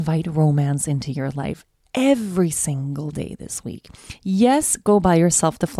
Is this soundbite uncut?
yes; 0 cuts

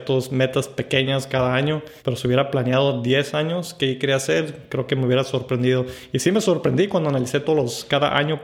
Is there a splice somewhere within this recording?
yes; 1 cut; at 2.0 s

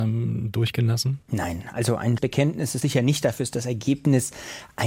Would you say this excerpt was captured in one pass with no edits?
no; 3 cuts; at 1.2 s, 2.2 s, 2.8 s

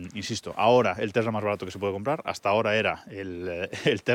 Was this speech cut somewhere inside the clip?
no; 0 cuts

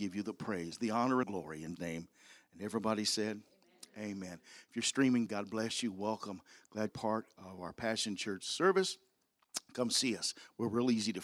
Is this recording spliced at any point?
yes; 4 cuts; at 1.2 s, 1.8 s, 5.3 s, 6.9 s

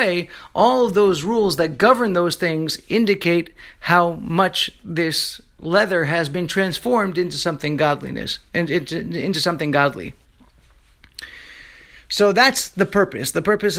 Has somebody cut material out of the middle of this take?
no; 0 cuts

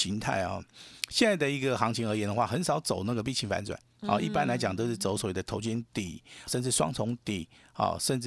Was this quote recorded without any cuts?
no; 1 cut; at 6.5 s

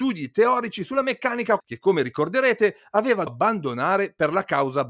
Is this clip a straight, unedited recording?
no; 2 cuts; at 1.6 s, 3.3 s

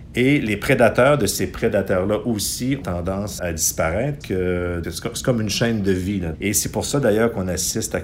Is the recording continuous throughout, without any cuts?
no; 5 cuts; at 2.8 s, 3.4 s, 4.2 s, 4.8 s, 6.3 s

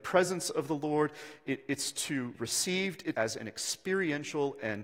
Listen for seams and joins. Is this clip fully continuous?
no; 2 cuts; at 2.3 s, 3.1 s

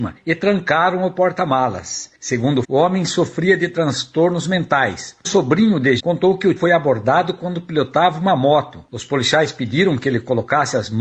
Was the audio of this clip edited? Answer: yes; 4 cuts; at 2.6 s, 5.2 s, 6.0 s, 6.6 s

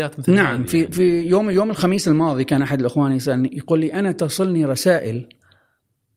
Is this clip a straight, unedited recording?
yes; 0 cuts

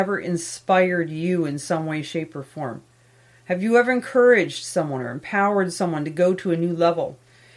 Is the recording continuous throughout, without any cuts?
yes; 0 cuts

